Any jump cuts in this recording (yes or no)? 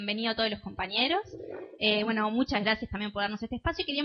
no